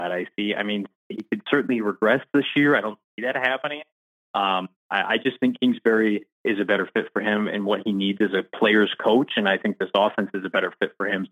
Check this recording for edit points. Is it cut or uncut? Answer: cut